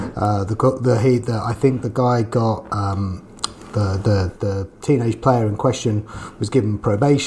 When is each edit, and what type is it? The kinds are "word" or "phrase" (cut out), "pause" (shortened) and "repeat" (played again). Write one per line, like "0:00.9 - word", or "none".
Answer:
none